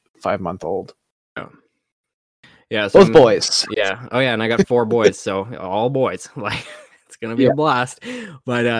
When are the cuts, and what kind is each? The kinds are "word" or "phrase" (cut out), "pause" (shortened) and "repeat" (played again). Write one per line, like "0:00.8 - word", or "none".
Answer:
none

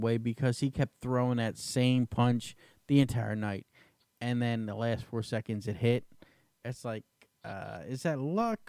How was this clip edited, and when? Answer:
none

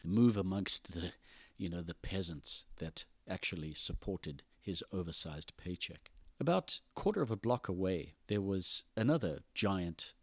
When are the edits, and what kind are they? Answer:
0:04.5 - pause
0:06.9 - pause
0:08.2 - pause
0:08.9 - pause

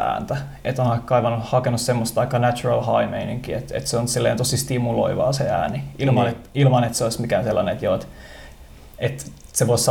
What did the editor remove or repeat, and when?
none

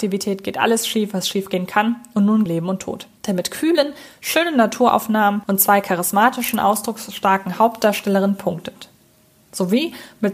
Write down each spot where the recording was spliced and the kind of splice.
0:02.5 - phrase
0:03.2 - pause

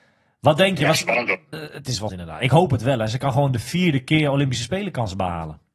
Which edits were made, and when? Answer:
0:01.5 - word
0:02.1 - word

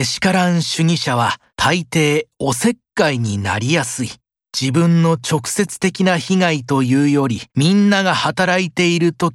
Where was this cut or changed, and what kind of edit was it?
0:01.5 - pause
0:04.4 - pause
0:07.5 - pause

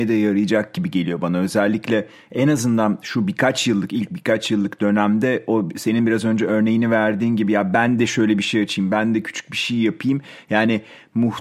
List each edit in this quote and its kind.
none

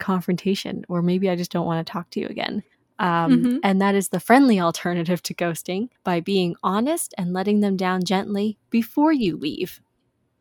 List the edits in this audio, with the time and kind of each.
0:02.7 - pause

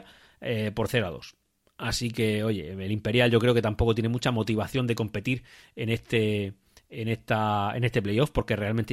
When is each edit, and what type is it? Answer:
none

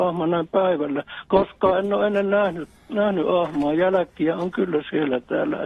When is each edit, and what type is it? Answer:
none

